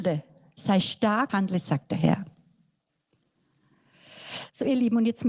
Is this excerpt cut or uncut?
cut